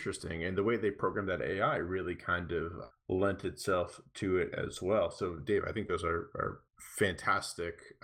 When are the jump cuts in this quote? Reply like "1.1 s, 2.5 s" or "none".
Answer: 2.9 s, 6.7 s